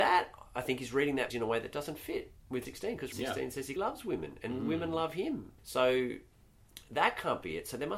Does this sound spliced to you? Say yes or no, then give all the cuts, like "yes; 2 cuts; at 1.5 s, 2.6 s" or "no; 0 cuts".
yes; 5 cuts; at 1.3 s, 2.6 s, 3.1 s, 3.8 s, 5.6 s